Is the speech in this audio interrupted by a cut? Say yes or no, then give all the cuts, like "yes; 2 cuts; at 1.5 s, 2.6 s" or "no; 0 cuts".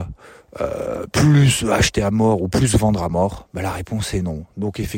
no; 0 cuts